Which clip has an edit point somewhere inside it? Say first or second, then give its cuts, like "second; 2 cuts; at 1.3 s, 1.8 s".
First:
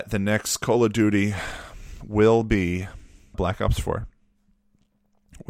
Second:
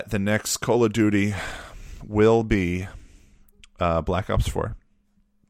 first; 1 cut; at 3.3 s